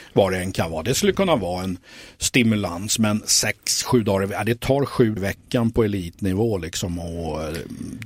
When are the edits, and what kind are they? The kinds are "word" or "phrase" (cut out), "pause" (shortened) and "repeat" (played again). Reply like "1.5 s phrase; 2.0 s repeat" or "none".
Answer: 5.2 s word